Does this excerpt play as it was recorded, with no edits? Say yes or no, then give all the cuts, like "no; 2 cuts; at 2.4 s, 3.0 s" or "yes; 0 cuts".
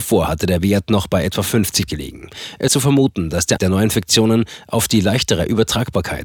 no; 3 cuts; at 1.9 s, 2.7 s, 3.6 s